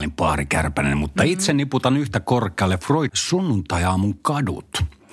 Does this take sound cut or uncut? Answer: cut